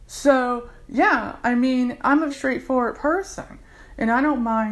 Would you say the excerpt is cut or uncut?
cut